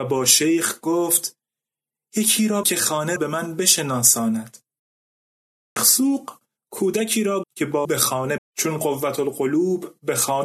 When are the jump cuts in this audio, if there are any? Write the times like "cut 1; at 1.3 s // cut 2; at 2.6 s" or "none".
cut 1; at 2.6 s // cut 2; at 3.2 s // cut 3; at 5.8 s // cut 4; at 7.4 s // cut 5; at 7.8 s // cut 6; at 8.4 s